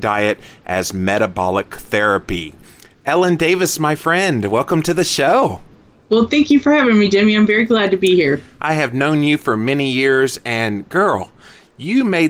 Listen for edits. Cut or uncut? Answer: uncut